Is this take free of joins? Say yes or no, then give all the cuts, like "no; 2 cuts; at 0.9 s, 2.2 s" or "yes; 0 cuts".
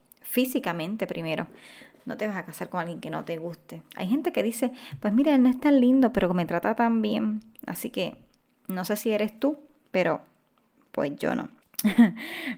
yes; 0 cuts